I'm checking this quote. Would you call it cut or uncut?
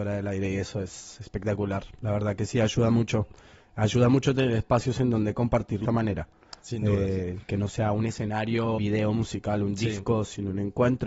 cut